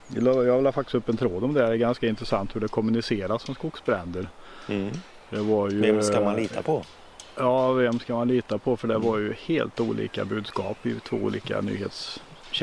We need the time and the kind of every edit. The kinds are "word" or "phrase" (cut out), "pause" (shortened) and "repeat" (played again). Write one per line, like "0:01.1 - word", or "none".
none